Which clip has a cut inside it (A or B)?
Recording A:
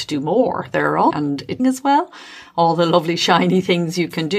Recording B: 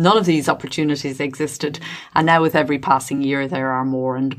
A